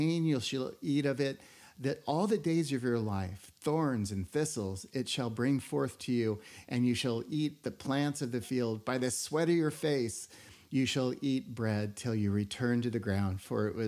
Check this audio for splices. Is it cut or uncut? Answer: uncut